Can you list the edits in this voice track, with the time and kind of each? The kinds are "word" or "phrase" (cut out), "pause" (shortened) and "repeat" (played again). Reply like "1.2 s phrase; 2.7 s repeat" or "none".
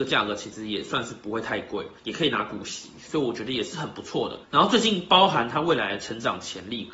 2.0 s pause; 4.4 s pause